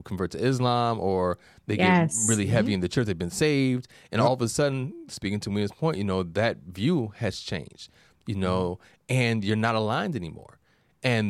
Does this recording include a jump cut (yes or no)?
no